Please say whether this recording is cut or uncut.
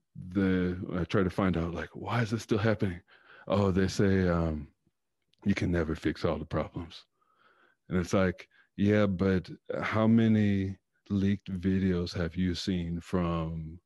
uncut